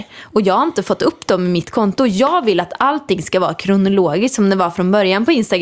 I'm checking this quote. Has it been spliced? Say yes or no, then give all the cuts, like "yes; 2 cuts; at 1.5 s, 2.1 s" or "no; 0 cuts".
no; 0 cuts